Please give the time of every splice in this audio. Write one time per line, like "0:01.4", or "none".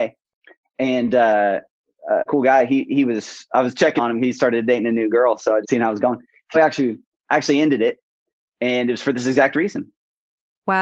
0:02.3
0:04.0
0:05.6
0:06.5